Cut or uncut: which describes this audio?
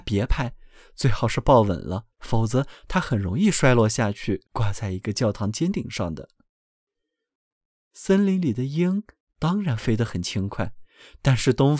cut